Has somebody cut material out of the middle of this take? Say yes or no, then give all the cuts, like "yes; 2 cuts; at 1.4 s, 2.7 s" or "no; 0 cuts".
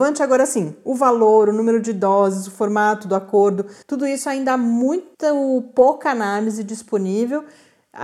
yes; 2 cuts; at 3.8 s, 5.1 s